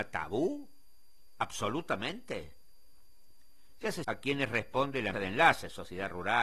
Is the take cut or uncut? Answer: cut